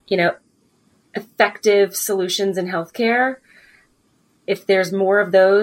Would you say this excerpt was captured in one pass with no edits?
yes; 0 cuts

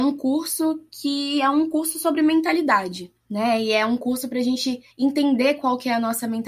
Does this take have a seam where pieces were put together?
yes; 2 cuts; at 3.2 s, 4.9 s

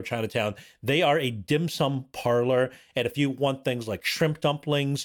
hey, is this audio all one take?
yes; 0 cuts

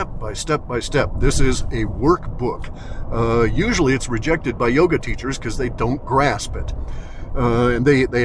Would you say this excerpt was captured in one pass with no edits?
yes; 0 cuts

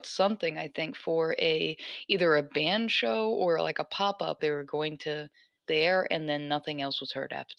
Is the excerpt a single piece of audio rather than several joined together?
no; 2 cuts; at 4.4 s, 5.6 s

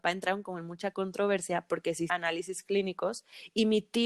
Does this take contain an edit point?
yes; 1 cut; at 2.1 s

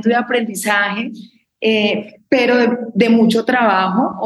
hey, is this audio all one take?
yes; 0 cuts

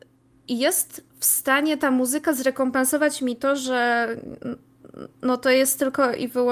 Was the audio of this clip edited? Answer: no; 0 cuts

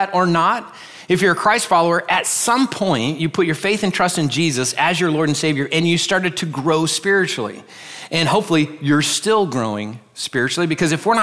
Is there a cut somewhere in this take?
no; 0 cuts

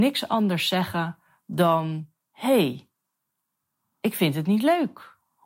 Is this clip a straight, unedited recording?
yes; 0 cuts

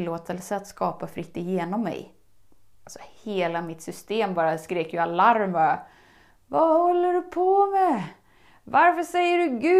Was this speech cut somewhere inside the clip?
no; 0 cuts

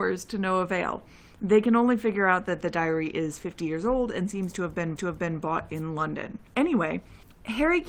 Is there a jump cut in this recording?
yes; 2 cuts; at 5.0 s, 6.5 s

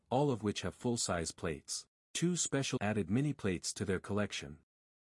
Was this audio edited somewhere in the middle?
yes; 2 cuts; at 2.0 s, 2.8 s

